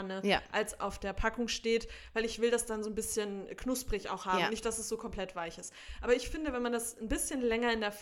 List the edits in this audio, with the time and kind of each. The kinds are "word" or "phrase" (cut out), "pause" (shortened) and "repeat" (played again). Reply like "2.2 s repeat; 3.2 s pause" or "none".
none